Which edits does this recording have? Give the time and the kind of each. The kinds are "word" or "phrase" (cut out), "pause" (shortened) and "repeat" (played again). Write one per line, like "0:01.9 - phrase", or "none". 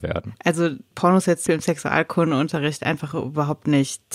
0:00.9 - word
0:01.5 - word